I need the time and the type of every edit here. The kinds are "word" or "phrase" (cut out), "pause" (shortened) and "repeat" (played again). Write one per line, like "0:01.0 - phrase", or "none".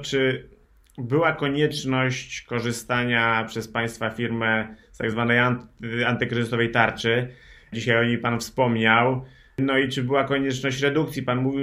none